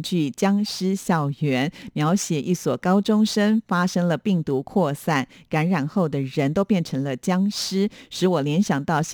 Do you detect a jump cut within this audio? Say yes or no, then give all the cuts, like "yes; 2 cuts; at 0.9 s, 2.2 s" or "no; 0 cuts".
no; 0 cuts